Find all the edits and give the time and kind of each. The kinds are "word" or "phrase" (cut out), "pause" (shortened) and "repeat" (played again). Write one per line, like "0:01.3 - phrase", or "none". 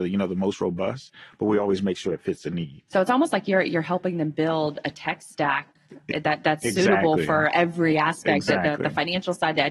none